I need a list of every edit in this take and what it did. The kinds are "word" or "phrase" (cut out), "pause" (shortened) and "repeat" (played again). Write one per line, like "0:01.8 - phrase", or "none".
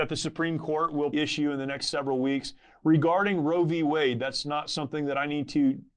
0:01.1 - word